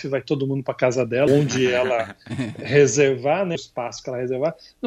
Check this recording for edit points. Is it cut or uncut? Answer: cut